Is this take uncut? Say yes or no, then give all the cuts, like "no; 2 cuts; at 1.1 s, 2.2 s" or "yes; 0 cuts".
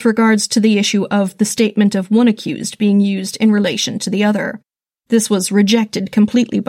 yes; 0 cuts